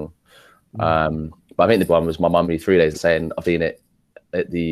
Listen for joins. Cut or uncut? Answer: cut